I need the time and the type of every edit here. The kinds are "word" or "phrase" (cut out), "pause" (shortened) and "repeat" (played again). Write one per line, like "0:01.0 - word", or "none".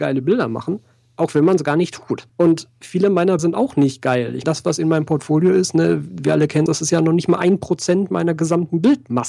0:02.3 - pause
0:03.4 - word
0:04.4 - word
0:06.7 - word